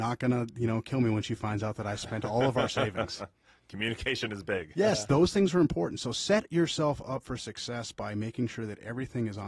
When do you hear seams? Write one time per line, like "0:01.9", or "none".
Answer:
none